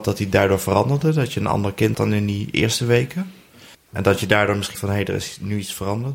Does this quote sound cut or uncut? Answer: cut